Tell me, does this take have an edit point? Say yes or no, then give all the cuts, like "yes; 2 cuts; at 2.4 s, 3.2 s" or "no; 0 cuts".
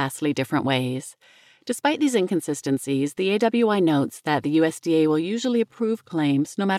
no; 0 cuts